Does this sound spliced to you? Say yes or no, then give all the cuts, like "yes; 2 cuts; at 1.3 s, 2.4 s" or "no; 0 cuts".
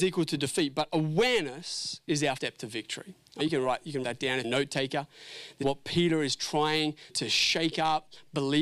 yes; 6 cuts; at 2.4 s, 3.4 s, 4.0 s, 4.4 s, 5.6 s, 7.1 s